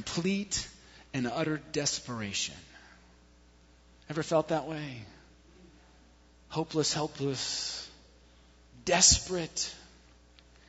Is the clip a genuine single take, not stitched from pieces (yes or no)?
yes